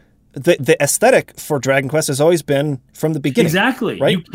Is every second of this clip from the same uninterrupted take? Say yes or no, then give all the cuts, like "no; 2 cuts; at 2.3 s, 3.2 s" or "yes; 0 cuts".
no; 1 cut; at 2.9 s